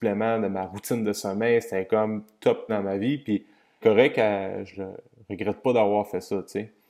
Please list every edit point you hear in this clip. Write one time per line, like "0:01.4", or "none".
0:02.7
0:03.8
0:04.7